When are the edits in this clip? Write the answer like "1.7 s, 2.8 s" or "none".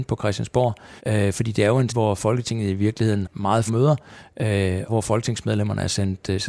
1.0 s, 1.9 s, 3.2 s, 3.7 s, 4.9 s